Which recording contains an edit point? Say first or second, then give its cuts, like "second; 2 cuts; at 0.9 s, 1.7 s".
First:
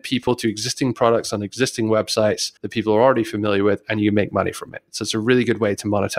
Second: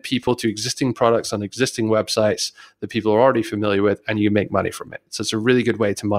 first; 1 cut; at 2.6 s